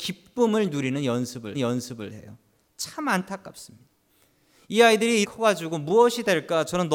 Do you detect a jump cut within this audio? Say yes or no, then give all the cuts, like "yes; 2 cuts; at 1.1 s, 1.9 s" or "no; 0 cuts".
yes; 2 cuts; at 1.5 s, 5.2 s